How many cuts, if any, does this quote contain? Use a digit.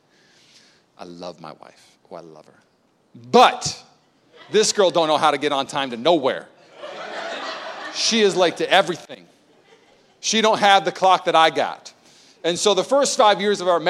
0